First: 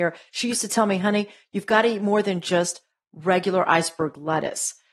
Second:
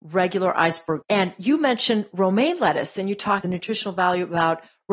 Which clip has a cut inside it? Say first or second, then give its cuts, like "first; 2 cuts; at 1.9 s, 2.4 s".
second; 2 cuts; at 1.0 s, 3.4 s